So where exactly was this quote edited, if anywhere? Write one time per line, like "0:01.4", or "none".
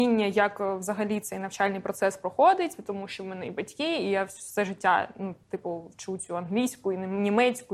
0:05.4